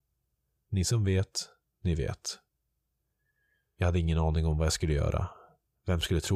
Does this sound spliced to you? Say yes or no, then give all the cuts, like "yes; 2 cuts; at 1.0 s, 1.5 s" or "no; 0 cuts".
no; 0 cuts